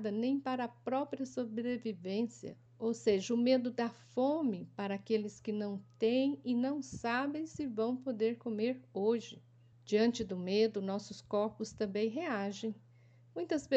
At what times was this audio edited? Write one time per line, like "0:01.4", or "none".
0:02.7
0:09.7